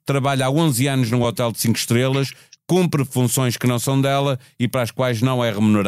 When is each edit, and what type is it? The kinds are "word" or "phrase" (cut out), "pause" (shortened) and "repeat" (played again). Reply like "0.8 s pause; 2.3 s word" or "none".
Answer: none